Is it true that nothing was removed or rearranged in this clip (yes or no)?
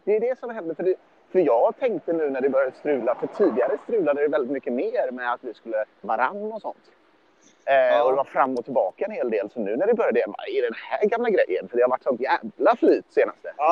no